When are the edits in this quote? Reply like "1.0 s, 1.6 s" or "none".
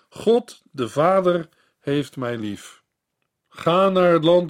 none